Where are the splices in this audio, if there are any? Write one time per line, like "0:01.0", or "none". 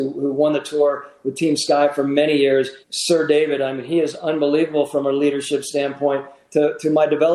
0:02.8